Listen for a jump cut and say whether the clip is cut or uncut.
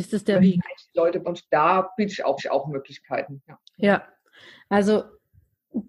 cut